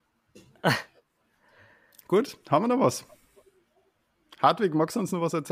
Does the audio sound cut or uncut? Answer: uncut